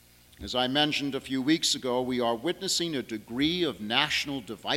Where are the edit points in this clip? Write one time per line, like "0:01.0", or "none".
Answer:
none